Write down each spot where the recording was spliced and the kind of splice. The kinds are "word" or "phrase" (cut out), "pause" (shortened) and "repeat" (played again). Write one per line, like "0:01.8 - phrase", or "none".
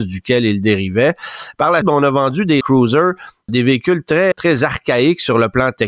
0:01.8 - word
0:02.6 - word
0:03.5 - word
0:04.3 - word